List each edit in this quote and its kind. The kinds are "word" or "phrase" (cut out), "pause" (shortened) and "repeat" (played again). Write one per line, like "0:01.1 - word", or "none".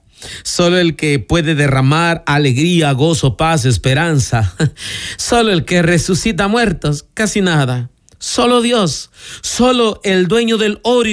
none